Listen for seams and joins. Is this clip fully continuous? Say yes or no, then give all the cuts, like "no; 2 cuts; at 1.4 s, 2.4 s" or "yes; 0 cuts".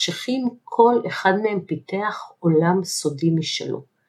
yes; 0 cuts